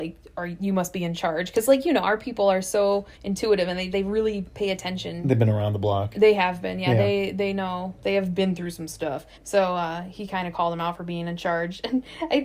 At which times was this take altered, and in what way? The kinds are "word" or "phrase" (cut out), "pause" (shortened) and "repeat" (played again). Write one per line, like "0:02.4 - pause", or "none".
0:03.1 - pause
0:03.9 - word
0:09.3 - pause

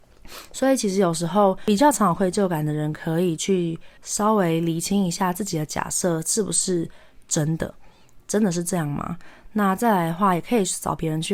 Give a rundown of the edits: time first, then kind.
0:04.0 - pause

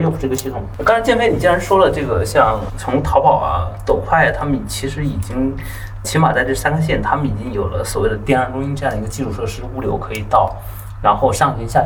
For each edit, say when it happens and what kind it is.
0:02.7 - word
0:06.0 - word

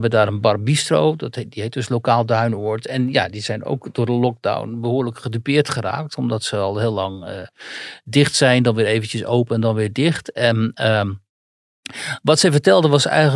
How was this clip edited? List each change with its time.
none

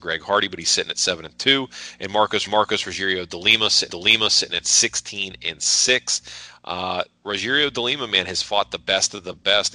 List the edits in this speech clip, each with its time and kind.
0:02.5 - repeat
0:03.9 - repeat

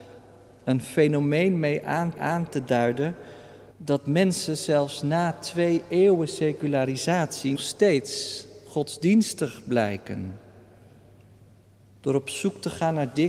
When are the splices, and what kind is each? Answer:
0:02.2 - repeat
0:03.7 - pause
0:07.5 - word

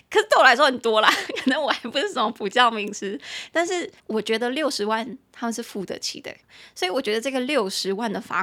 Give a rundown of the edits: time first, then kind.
0:04.0 - pause

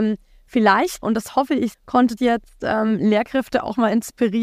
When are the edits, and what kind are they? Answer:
0:01.0 - word
0:01.7 - word
0:02.2 - word

